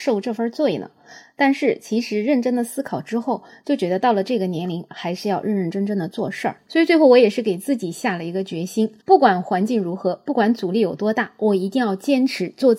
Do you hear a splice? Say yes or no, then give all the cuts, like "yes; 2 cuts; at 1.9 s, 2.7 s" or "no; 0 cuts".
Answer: yes; 1 cut; at 9.0 s